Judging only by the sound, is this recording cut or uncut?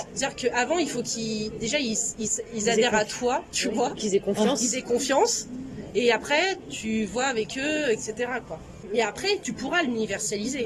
uncut